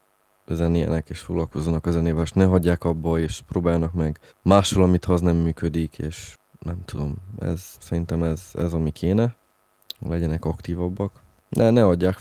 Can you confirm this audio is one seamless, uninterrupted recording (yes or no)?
no